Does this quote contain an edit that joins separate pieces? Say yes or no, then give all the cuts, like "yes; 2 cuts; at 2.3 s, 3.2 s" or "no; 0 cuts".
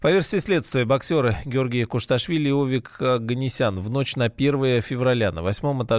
no; 0 cuts